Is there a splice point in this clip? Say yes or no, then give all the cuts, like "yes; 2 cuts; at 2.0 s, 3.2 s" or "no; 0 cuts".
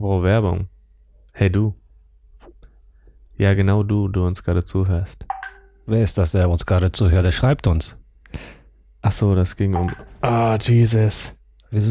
no; 0 cuts